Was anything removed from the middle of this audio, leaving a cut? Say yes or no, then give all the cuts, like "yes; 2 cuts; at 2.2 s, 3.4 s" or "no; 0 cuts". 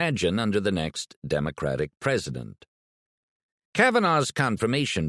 no; 0 cuts